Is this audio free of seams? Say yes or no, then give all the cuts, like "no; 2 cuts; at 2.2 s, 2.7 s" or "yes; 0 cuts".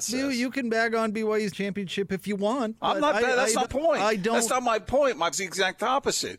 no; 3 cuts; at 1.5 s, 3.6 s, 5.3 s